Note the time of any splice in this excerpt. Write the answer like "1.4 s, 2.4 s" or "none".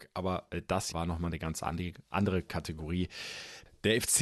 0.9 s